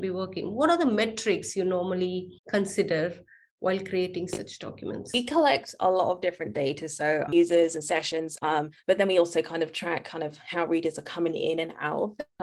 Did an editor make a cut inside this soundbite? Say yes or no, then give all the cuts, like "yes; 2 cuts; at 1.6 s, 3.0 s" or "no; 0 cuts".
yes; 2 cuts; at 2.4 s, 7.3 s